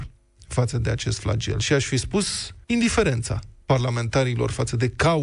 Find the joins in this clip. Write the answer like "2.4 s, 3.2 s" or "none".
2.6 s